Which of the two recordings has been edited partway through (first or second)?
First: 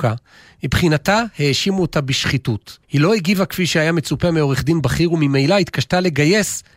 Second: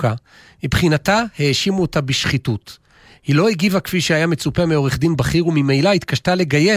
first